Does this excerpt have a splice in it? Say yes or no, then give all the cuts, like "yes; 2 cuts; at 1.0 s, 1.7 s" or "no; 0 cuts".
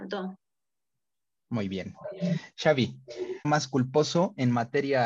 yes; 1 cut; at 3.4 s